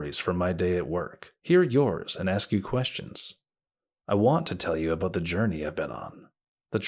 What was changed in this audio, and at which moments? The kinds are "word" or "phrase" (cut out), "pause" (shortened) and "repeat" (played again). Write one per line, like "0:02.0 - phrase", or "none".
0:01.4 - pause